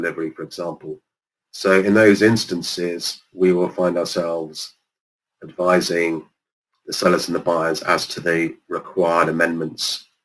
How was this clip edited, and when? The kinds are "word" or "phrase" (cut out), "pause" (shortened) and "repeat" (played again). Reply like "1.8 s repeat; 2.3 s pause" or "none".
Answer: none